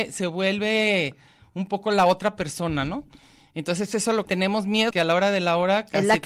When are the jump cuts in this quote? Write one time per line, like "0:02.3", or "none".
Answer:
0:04.2
0:04.9